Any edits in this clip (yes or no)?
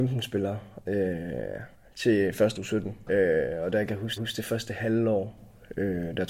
yes